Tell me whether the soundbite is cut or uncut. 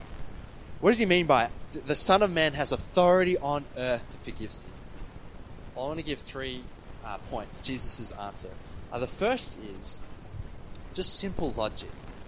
uncut